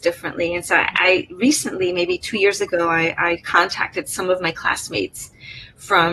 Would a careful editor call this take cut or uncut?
uncut